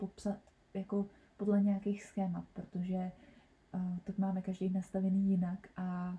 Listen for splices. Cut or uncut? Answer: uncut